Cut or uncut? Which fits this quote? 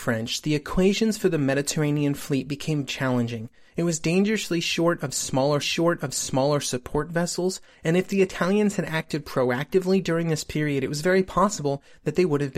cut